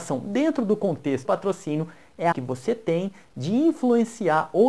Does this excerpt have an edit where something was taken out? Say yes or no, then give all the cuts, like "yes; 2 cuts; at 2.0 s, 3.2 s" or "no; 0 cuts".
yes; 2 cuts; at 1.2 s, 2.3 s